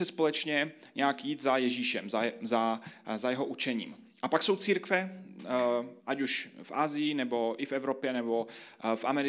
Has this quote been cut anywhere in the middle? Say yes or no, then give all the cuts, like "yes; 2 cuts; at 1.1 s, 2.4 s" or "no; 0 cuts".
yes; 2 cuts; at 4.1 s, 6.0 s